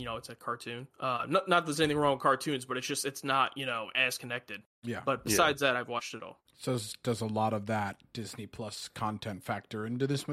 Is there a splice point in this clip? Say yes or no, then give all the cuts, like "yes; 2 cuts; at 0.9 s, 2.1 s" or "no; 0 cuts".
yes; 2 cuts; at 0.9 s, 6.5 s